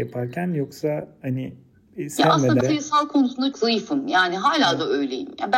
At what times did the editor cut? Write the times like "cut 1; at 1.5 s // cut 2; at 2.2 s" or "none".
cut 1; at 2.6 s // cut 2; at 3.5 s